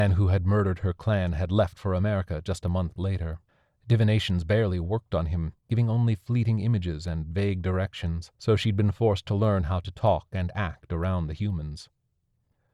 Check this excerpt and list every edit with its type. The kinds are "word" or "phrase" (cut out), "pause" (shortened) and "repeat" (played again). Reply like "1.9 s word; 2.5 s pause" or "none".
3.5 s pause; 5.6 s pause; 8.3 s pause